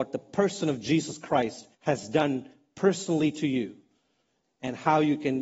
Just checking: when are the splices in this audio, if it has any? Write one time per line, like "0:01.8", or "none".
0:01.7